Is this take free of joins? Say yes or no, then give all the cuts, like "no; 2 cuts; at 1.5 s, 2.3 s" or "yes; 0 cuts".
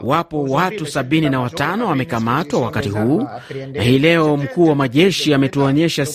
yes; 0 cuts